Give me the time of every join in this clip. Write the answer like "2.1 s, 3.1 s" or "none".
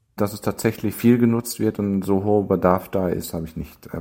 0.9 s